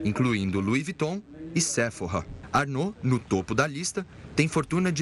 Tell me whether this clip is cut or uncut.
uncut